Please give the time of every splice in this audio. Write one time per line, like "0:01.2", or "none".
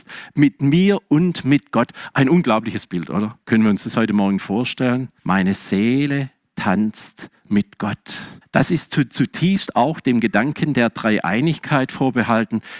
0:03.4
0:05.2
0:07.4
0:08.4